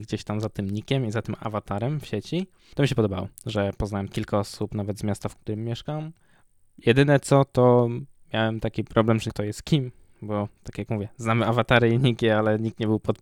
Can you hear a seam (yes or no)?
yes